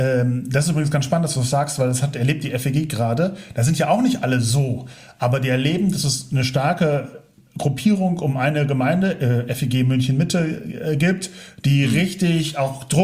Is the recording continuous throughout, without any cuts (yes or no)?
yes